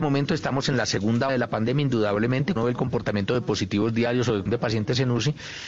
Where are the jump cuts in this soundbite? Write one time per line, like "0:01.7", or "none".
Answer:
0:01.3
0:02.6
0:04.5